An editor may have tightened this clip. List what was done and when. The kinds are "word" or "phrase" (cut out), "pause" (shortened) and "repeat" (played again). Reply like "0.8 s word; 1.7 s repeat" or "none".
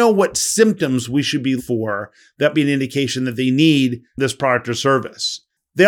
1.6 s word; 2.5 s word

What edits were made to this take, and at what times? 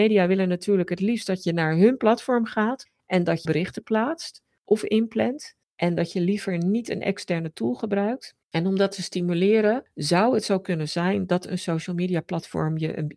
3.4 s phrase; 5.6 s pause; 8.4 s pause

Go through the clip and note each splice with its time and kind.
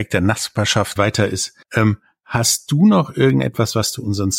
1.0 s phrase; 1.6 s pause

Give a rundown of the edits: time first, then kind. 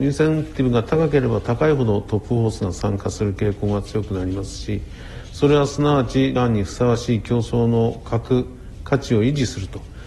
6.4 s word

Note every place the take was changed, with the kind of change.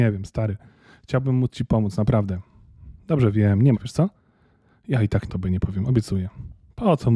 3.7 s word; 5.3 s word

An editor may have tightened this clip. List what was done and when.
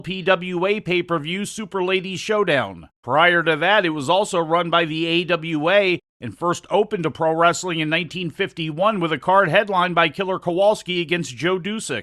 2.9 s pause

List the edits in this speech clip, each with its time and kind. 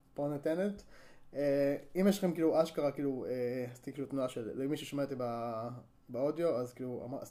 none

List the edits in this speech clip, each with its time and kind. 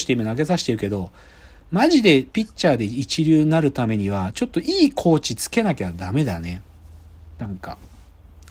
2.3 s pause

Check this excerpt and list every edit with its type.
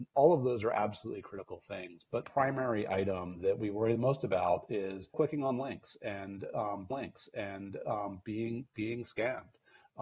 2.2 s phrase; 5.1 s word; 6.9 s repeat

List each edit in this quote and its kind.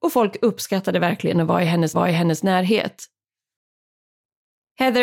1.9 s repeat

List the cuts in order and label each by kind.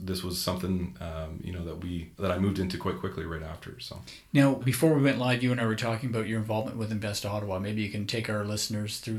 4.6 s word

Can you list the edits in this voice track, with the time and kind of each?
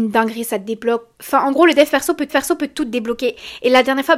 1.1 s pause; 2.3 s repeat

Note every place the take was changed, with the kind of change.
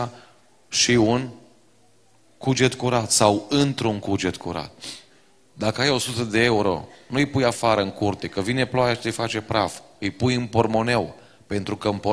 none

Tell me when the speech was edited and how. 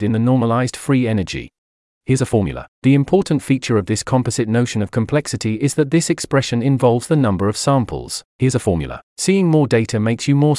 1.7 s pause

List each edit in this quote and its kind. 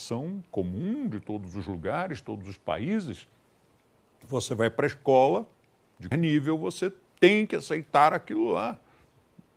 6.1 s word

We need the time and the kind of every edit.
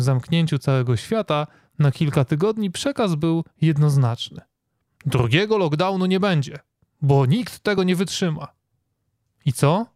none

